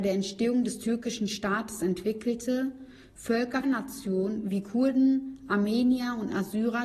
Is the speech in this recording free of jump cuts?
no; 1 cut; at 3.6 s

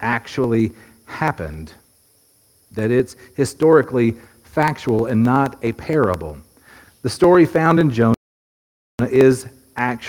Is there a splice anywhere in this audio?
no; 0 cuts

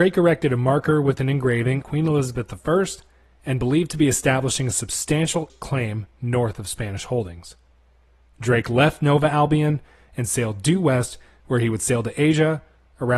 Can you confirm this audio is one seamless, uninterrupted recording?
no; 2 cuts; at 1.8 s, 5.5 s

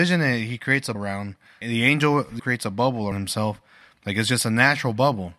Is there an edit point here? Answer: yes; 4 cuts; at 0.9 s, 1.6 s, 2.4 s, 3.1 s

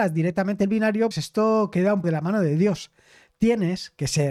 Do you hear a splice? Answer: yes; 2 cuts; at 1.1 s, 2.0 s

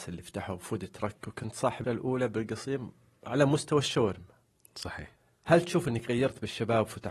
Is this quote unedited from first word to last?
no; 2 cuts; at 1.8 s, 5.2 s

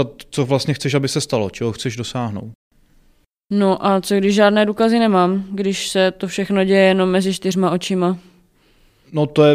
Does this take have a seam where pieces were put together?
no; 0 cuts

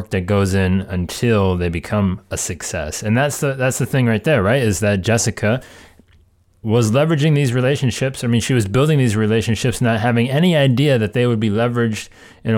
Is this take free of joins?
yes; 0 cuts

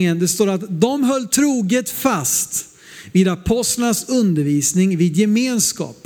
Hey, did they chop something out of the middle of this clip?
no; 0 cuts

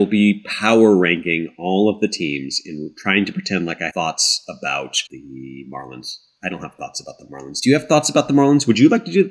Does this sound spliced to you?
yes; 2 cuts; at 3.9 s, 5.1 s

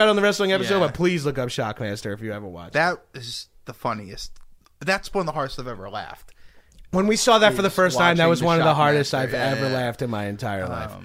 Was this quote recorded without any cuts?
yes; 0 cuts

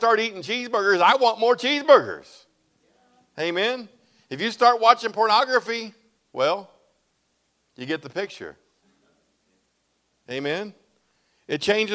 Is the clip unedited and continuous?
yes; 0 cuts

